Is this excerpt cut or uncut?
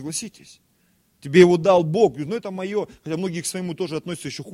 uncut